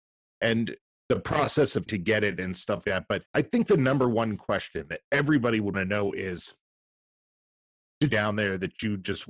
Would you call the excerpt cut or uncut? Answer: cut